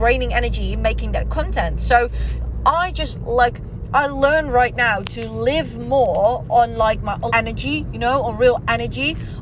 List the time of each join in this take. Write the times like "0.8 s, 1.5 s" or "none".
7.3 s